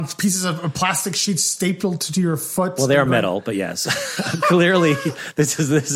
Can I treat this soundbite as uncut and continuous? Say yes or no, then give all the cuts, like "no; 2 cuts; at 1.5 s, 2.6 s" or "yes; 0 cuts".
yes; 0 cuts